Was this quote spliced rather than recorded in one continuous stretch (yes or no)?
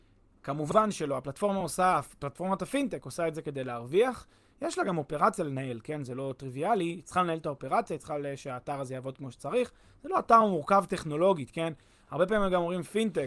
no